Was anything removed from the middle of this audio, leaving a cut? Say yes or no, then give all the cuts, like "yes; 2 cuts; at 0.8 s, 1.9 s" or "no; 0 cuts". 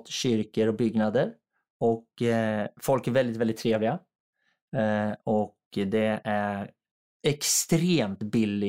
no; 0 cuts